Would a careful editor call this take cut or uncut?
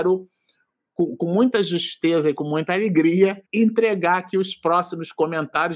cut